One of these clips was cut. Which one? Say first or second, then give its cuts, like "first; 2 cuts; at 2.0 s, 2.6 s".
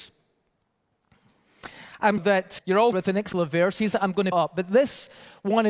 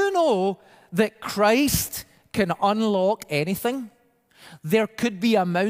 first; 5 cuts; at 2.2 s, 2.6 s, 2.9 s, 3.3 s, 4.3 s